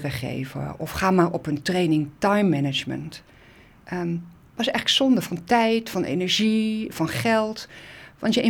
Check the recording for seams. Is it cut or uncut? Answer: uncut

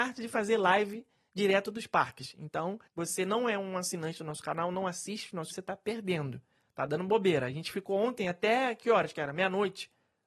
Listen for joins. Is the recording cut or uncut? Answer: cut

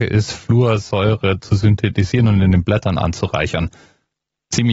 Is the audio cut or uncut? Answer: uncut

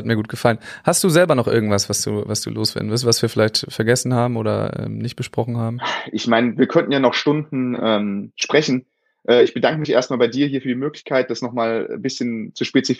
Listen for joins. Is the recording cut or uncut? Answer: uncut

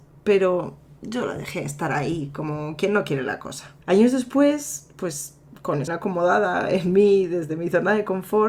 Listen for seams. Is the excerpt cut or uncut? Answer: cut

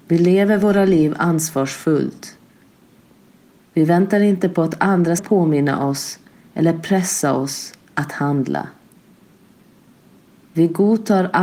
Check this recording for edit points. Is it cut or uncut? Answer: cut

